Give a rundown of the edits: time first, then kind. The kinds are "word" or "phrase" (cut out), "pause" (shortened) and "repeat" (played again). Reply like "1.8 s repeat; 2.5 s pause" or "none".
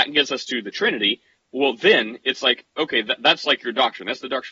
none